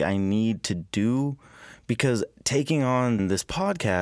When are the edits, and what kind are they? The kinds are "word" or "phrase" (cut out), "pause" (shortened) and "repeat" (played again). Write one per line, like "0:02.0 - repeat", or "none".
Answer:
none